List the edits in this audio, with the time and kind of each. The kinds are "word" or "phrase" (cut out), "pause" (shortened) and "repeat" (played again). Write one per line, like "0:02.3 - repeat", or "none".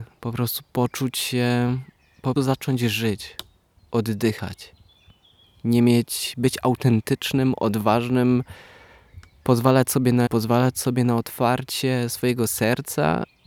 0:02.4 - word
0:10.3 - word